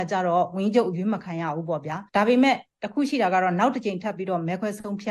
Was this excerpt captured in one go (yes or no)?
no